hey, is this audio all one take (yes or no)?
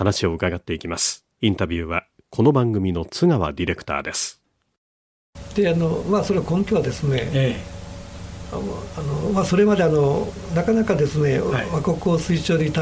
no